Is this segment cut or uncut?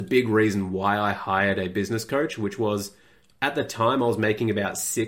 uncut